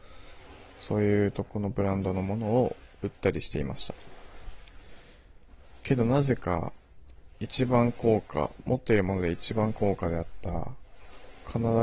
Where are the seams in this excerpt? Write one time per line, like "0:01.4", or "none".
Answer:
none